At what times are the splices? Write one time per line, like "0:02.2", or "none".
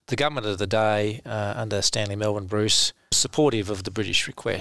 0:03.1